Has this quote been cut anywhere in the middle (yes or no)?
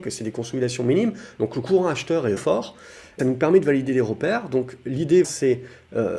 yes